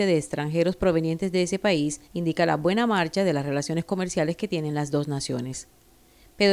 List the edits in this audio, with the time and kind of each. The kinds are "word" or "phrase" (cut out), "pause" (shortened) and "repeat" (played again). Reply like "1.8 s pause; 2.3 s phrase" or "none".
2.1 s pause

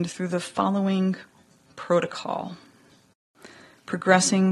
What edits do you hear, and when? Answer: none

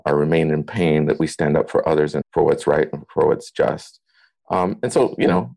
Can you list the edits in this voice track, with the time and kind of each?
2.2 s word

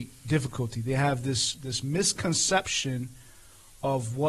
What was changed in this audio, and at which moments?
none

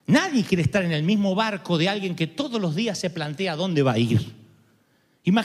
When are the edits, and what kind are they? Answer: none

